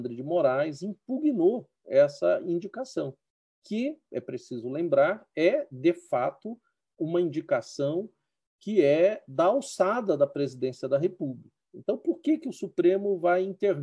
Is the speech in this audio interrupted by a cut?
no; 0 cuts

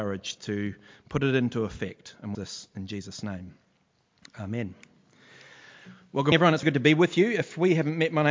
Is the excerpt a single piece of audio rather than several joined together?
no; 3 cuts; at 2.3 s, 6.3 s, 6.6 s

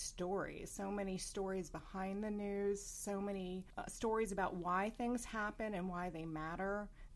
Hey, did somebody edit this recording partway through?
no; 0 cuts

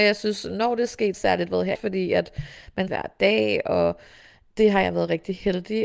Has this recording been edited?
yes; 3 cuts; at 1.1 s, 1.7 s, 2.9 s

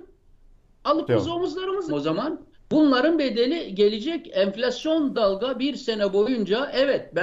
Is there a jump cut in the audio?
yes; 4 cuts; at 1.1 s, 1.9 s, 2.5 s, 5.1 s

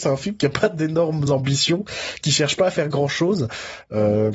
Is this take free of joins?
yes; 0 cuts

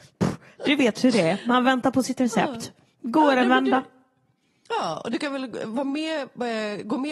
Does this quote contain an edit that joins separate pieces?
no; 0 cuts

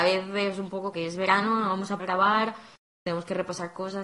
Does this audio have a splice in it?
yes; 3 cuts; at 0.9 s, 2.0 s, 2.9 s

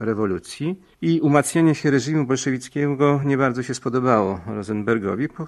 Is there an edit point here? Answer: no; 0 cuts

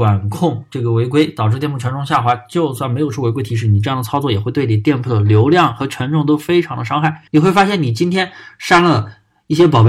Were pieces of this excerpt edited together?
yes; 1 cut; at 7.3 s

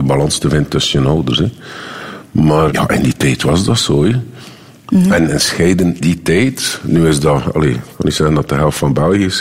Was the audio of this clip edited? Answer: yes; 2 cuts; at 2.7 s, 6.0 s

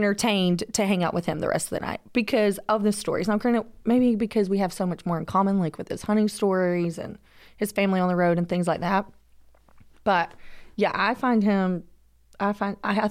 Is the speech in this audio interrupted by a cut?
no; 0 cuts

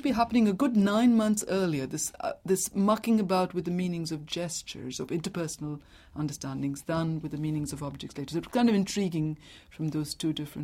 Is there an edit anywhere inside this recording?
no; 0 cuts

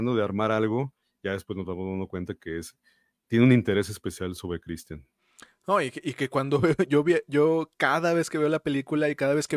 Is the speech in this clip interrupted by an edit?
no; 0 cuts

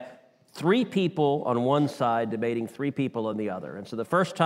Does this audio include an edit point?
no; 0 cuts

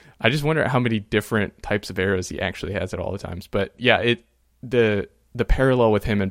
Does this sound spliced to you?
no; 0 cuts

